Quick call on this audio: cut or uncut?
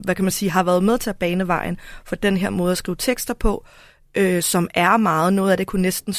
uncut